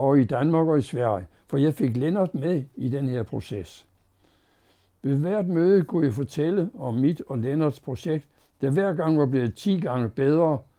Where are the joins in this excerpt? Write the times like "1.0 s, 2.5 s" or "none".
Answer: none